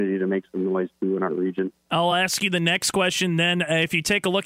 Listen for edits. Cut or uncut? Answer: uncut